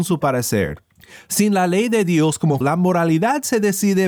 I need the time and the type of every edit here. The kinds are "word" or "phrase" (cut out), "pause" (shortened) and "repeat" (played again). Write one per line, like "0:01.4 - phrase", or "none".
0:02.6 - word